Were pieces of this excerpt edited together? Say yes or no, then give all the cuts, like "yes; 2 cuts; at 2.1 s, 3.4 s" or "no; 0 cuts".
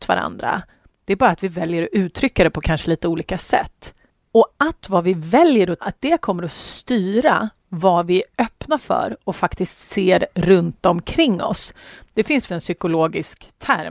yes; 2 cuts; at 5.8 s, 12.5 s